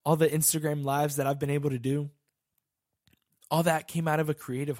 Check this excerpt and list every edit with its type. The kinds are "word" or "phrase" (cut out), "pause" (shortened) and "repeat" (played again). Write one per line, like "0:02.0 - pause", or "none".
none